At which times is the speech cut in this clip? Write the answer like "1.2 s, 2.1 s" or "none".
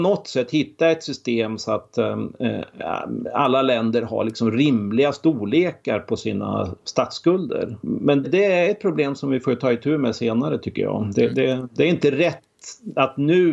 8.2 s